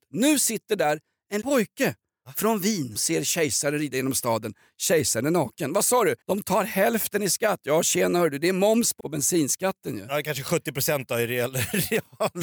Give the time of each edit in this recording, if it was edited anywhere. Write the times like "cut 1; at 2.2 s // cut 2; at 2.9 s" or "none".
cut 1; at 1.4 s // cut 2; at 3.0 s // cut 3; at 6.2 s // cut 4; at 9.0 s